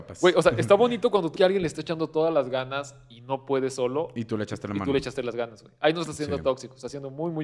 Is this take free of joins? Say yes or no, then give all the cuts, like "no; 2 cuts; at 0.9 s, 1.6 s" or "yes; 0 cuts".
no; 1 cut; at 1.4 s